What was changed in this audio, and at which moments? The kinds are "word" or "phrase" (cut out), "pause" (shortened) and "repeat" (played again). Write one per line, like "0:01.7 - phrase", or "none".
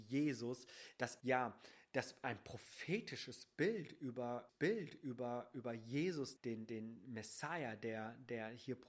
0:01.2 - phrase
0:04.5 - repeat
0:06.4 - word